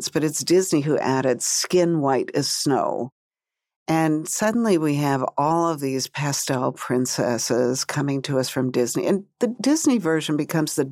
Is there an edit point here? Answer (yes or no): no